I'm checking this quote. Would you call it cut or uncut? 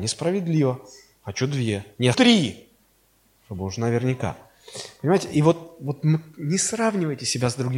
cut